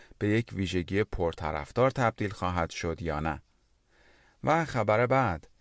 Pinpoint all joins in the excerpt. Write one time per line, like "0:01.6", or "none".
none